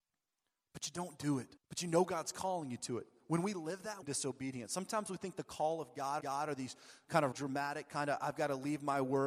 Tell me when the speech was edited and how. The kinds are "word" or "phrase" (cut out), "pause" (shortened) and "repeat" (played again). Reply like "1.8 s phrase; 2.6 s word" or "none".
1.6 s pause; 4.0 s phrase; 6.2 s repeat; 7.3 s word